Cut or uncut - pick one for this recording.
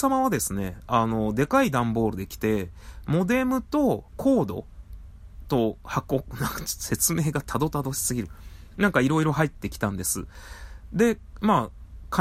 cut